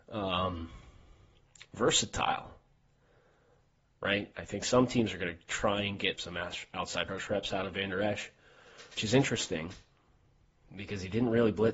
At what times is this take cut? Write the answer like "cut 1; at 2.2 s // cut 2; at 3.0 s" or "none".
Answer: cut 1; at 6.2 s // cut 2; at 7.1 s // cut 3; at 9.0 s